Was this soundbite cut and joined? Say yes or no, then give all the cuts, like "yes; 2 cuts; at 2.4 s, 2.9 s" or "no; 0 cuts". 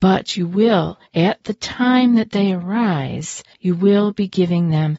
yes; 2 cuts; at 1.1 s, 3.5 s